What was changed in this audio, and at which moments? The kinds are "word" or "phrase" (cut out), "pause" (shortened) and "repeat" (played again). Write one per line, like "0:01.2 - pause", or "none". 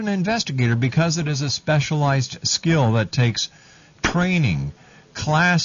none